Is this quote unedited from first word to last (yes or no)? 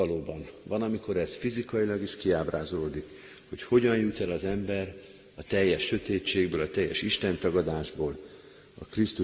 yes